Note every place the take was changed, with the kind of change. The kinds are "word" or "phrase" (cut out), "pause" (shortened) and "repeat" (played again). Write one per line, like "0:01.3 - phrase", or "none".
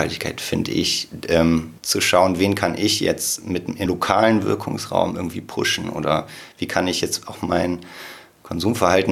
0:01.8 - pause
0:03.9 - phrase